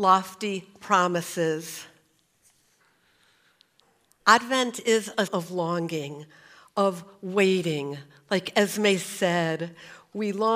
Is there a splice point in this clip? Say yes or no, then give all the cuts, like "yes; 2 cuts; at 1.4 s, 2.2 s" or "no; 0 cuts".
yes; 1 cut; at 5.3 s